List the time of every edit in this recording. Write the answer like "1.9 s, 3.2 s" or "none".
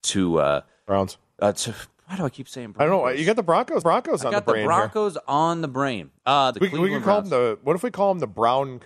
3.8 s, 6.5 s